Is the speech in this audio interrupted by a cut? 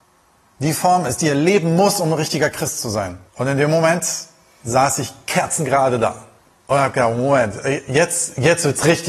yes; 2 cuts; at 3.3 s, 6.4 s

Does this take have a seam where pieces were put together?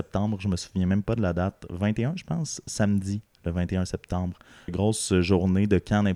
yes; 1 cut; at 4.7 s

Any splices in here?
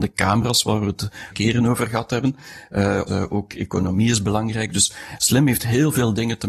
yes; 2 cuts; at 1.3 s, 3.1 s

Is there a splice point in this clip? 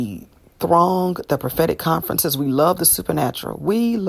no; 0 cuts

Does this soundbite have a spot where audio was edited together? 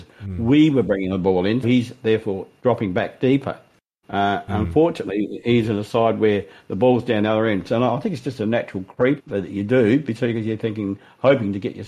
yes; 2 cuts; at 1.6 s, 9.2 s

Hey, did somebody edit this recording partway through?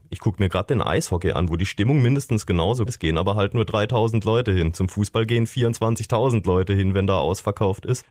yes; 1 cut; at 2.9 s

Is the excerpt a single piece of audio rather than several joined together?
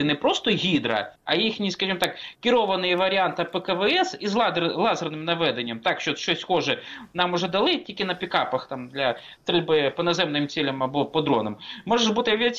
no; 1 cut; at 1.2 s

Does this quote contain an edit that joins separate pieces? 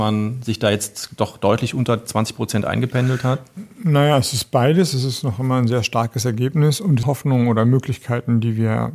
yes; 2 cuts; at 3.7 s, 7.0 s

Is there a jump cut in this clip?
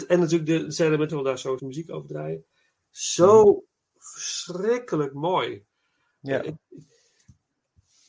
yes; 2 cuts; at 1.1 s, 1.6 s

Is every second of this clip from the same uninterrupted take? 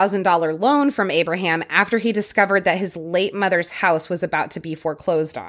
yes; 0 cuts

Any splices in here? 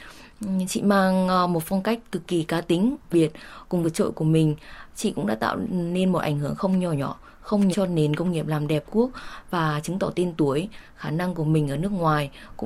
yes; 4 cuts; at 3.1 s, 3.8 s, 7.7 s, 8.9 s

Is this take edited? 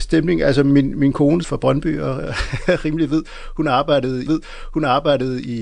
yes; 2 cuts; at 1.4 s, 4.3 s

